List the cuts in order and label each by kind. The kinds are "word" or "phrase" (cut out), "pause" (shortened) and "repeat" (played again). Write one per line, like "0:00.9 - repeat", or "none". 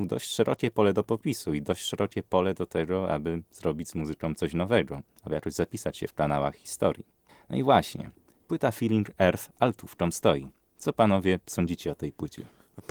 0:07.3 - pause